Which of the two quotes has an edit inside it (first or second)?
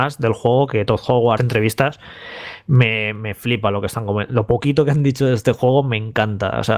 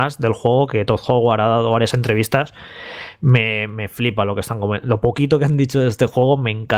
first